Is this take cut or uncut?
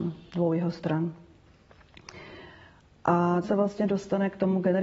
cut